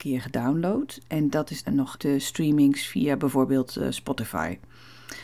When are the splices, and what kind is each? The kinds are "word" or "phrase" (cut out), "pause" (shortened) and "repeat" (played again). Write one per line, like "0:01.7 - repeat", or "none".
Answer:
0:01.6 - word
0:02.0 - word